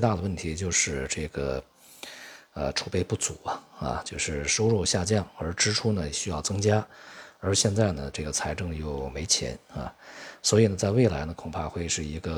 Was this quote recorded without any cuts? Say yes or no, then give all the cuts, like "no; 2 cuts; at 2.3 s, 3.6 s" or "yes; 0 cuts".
yes; 0 cuts